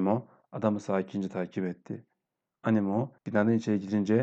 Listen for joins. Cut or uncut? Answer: cut